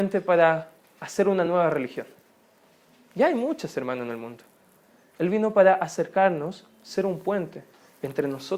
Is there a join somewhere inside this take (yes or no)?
no